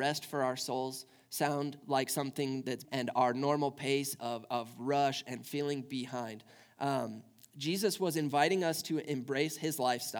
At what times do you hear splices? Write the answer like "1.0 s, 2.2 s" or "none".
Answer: 2.8 s

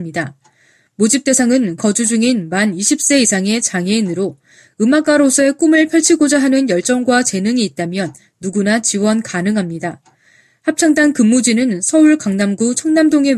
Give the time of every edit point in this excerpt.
1.8 s

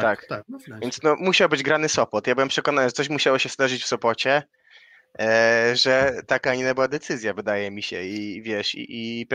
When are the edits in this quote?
none

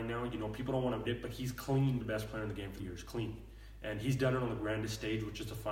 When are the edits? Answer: 1.0 s, 2.0 s, 2.8 s

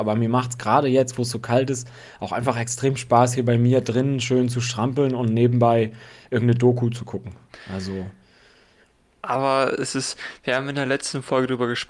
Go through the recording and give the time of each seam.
none

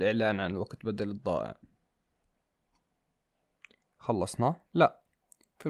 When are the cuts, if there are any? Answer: 4.6 s

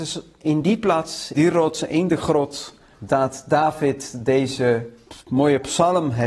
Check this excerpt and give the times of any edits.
1.3 s, 2.9 s

